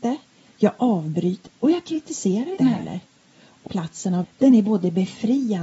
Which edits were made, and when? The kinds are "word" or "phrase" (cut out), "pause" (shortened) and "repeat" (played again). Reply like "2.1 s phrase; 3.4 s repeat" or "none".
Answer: 1.5 s word; 2.6 s word; 3.7 s word; 4.2 s word

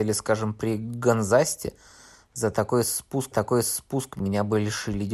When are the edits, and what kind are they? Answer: 3.3 s repeat

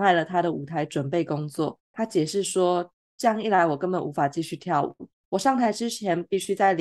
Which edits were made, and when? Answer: 1.8 s pause; 5.2 s pause

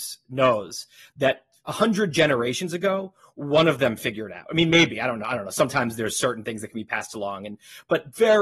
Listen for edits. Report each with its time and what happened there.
none

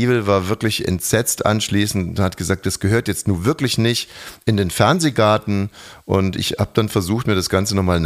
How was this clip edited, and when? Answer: none

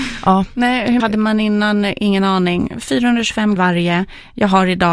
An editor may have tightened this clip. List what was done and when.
1.0 s word; 3.6 s phrase

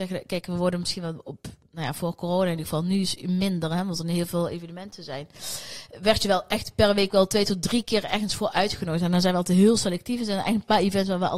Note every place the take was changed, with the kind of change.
none

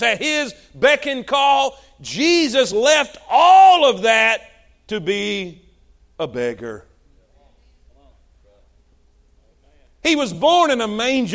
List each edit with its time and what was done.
none

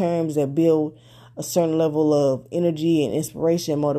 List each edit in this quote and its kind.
none

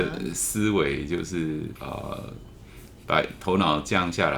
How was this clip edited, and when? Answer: 1.8 s pause

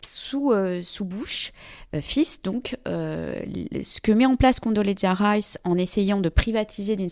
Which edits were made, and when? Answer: none

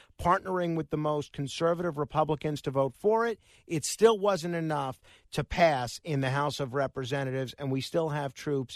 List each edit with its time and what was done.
none

